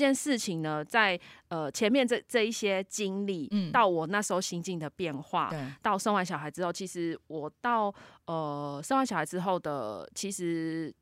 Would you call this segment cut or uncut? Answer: uncut